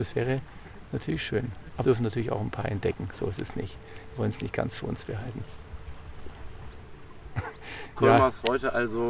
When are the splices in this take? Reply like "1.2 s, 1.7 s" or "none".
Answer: 1.8 s